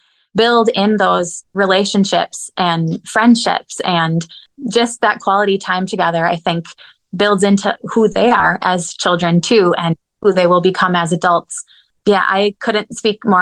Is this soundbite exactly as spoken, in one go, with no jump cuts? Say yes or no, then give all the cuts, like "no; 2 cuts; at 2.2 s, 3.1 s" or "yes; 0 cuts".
yes; 0 cuts